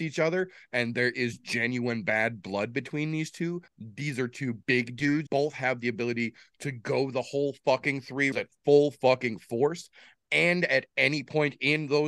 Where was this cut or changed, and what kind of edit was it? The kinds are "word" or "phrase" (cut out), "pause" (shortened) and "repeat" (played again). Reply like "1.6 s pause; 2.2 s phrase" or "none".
3.7 s pause; 4.6 s pause; 5.3 s word; 8.3 s word